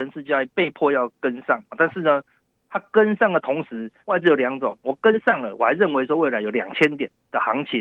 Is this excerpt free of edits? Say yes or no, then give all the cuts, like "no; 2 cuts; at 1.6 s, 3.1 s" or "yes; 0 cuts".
no; 1 cut; at 4.0 s